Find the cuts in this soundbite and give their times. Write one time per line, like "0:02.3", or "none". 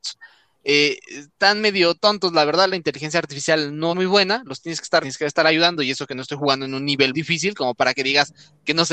0:03.9
0:05.0
0:07.1